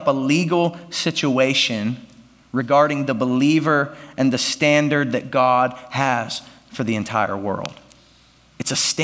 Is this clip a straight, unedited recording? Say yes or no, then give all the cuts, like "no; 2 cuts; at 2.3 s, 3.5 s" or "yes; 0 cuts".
yes; 0 cuts